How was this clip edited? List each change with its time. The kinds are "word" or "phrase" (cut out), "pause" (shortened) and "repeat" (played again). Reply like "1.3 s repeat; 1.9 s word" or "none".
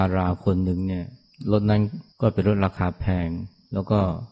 2.1 s pause